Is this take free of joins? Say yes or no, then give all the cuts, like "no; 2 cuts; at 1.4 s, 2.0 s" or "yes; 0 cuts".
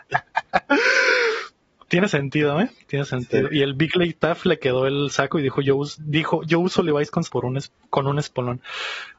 no; 1 cut; at 7.2 s